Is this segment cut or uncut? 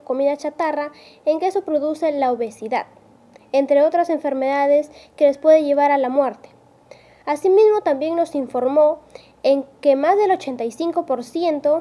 uncut